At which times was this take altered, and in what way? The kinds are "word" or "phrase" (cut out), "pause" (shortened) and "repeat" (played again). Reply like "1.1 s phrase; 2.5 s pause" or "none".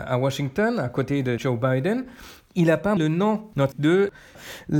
1.4 s word; 3.0 s word; 3.7 s word